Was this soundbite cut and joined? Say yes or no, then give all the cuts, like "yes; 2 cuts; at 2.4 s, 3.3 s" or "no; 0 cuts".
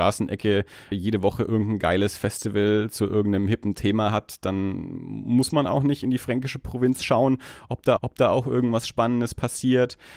yes; 2 cuts; at 0.9 s, 8.0 s